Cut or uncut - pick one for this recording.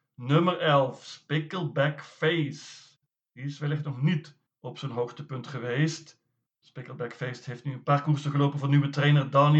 uncut